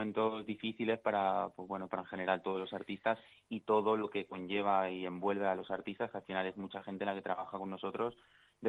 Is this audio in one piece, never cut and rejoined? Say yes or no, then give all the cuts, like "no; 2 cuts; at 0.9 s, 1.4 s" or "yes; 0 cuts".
yes; 0 cuts